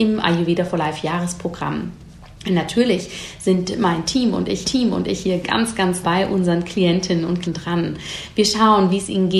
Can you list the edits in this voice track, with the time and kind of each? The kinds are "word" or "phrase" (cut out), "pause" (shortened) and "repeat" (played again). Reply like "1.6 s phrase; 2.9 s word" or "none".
4.6 s repeat; 6.0 s word; 7.4 s word